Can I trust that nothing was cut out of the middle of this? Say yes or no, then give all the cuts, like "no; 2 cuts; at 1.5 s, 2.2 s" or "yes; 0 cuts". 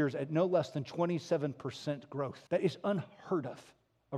no; 1 cut; at 2.5 s